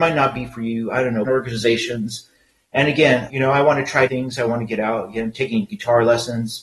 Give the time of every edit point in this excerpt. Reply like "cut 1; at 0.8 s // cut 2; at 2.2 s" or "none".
cut 1; at 1.2 s // cut 2; at 3.3 s // cut 3; at 4.1 s